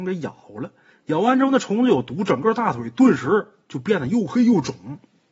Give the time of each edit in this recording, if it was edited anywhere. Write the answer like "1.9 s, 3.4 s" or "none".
0.9 s